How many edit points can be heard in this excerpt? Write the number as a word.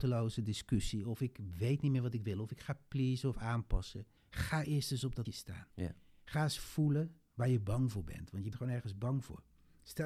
four